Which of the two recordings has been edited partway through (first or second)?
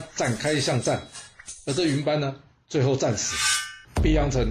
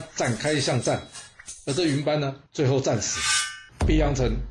second